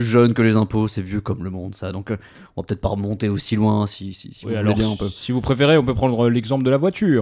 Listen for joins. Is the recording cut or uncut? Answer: uncut